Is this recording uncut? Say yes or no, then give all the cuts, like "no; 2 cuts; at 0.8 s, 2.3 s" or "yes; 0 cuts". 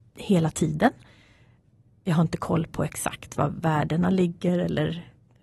yes; 0 cuts